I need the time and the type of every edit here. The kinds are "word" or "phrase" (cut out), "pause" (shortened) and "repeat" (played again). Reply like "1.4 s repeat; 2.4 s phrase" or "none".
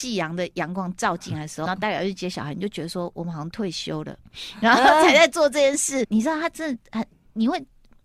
1.7 s word; 6.0 s word